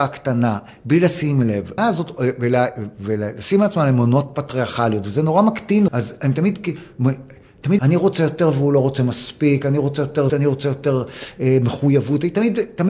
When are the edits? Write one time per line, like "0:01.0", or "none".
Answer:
0:01.8
0:05.9
0:07.8
0:10.3